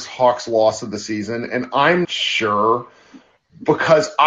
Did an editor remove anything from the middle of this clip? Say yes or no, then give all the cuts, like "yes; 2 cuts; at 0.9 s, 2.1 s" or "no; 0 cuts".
yes; 1 cut; at 2.0 s